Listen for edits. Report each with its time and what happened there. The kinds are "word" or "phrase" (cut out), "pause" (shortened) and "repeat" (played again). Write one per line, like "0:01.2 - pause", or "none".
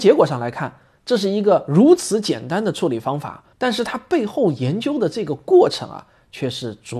0:03.5 - pause